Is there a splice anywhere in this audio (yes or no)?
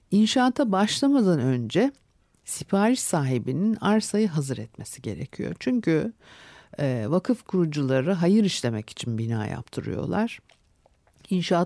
no